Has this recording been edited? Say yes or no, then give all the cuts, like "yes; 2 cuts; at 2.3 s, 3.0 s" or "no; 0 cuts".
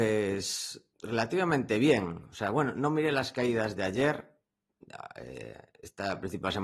yes; 1 cut; at 0.9 s